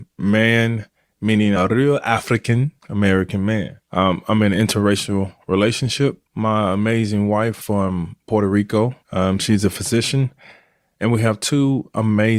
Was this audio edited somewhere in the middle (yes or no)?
yes